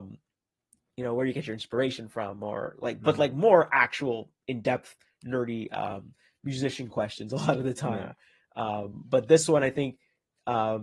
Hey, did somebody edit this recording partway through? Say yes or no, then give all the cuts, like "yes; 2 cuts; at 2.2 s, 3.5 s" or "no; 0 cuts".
no; 0 cuts